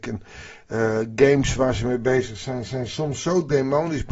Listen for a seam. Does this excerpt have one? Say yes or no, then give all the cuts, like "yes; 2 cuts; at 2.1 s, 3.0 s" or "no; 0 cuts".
no; 0 cuts